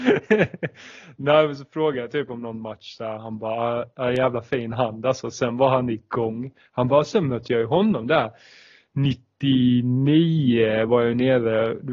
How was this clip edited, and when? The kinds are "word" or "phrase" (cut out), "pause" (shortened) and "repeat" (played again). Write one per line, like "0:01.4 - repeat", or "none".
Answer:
none